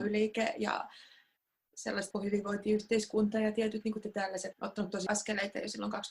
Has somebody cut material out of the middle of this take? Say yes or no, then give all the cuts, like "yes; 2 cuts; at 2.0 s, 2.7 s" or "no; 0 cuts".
yes; 4 cuts; at 2.1 s, 4.0 s, 4.5 s, 5.1 s